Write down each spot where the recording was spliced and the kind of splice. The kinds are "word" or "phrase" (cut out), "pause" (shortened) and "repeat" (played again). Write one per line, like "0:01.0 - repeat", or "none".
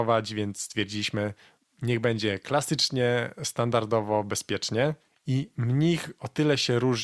none